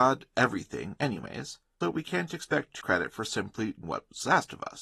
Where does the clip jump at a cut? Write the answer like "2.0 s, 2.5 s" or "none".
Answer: 1.8 s, 2.8 s, 3.8 s

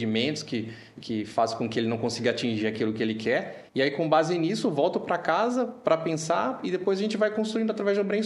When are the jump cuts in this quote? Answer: 3.7 s

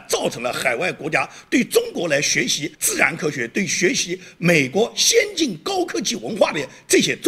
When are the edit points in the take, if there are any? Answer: 2.7 s

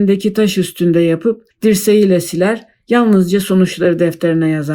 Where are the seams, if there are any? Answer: 1.5 s

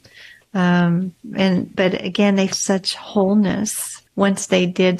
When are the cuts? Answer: 1.7 s, 2.5 s, 4.1 s

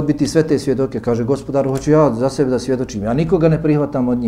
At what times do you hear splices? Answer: none

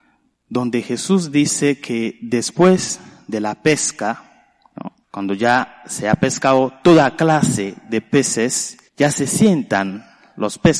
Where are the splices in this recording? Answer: 5.0 s, 8.9 s

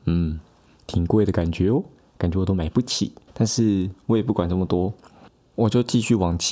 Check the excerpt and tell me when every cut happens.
3.3 s

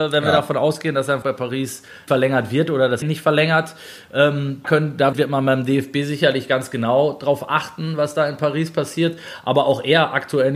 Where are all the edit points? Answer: 1.2 s, 2.1 s, 3.0 s, 4.6 s, 5.1 s

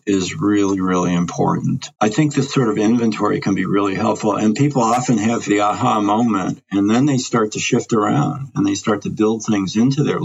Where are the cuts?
2.0 s

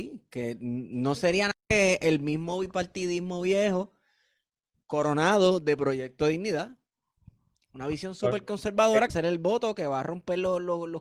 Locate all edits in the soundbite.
1.6 s, 9.1 s

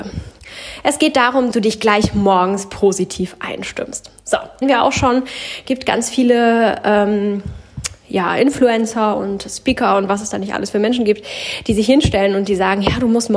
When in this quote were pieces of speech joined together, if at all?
1.5 s, 4.6 s

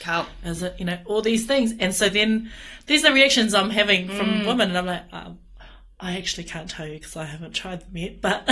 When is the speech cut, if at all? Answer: none

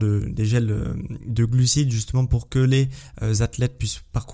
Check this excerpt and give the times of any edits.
none

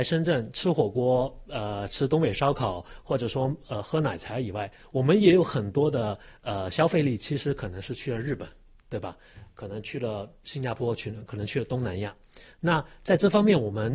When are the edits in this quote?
none

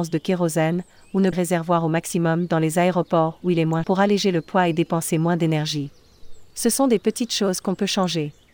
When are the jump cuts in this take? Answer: 1.3 s, 3.8 s

